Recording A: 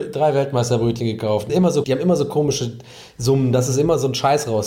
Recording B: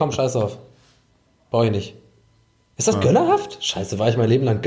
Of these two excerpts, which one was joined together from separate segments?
A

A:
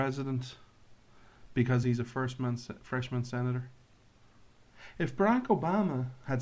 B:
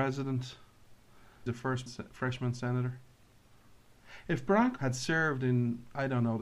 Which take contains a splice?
B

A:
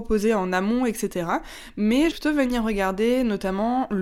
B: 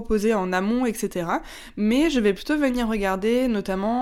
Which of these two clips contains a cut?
A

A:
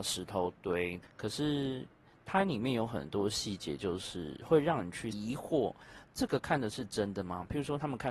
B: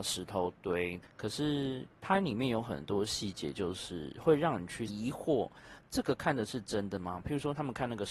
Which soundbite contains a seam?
B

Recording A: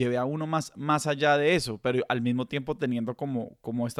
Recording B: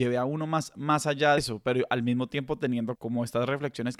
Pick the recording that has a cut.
B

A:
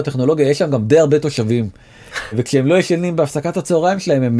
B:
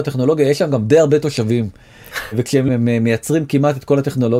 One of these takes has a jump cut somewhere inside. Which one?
B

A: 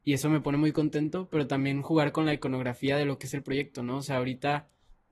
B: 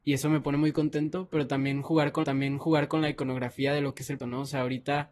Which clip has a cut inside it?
B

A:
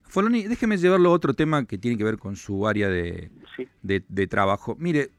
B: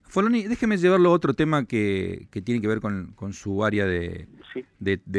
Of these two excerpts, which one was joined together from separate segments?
A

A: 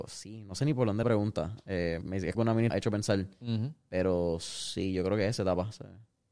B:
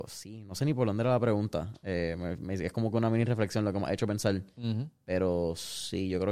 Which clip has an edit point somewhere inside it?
A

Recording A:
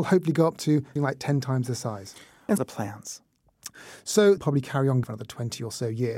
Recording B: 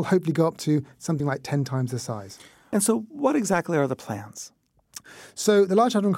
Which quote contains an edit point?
A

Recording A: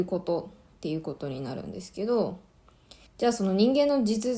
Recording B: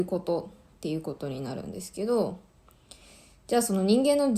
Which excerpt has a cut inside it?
A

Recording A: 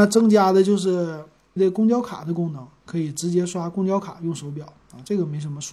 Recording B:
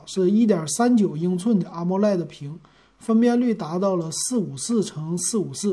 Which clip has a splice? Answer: A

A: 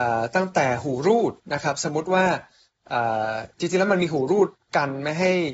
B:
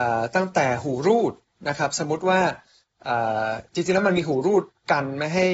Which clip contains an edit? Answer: A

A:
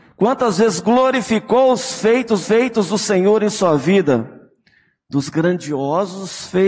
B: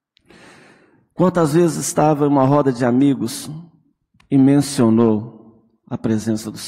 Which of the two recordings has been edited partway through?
A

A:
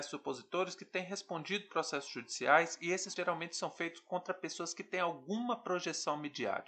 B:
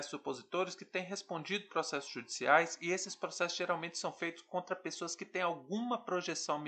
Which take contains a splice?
A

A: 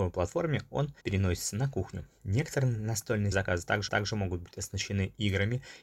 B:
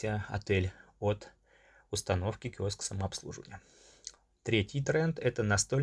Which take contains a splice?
A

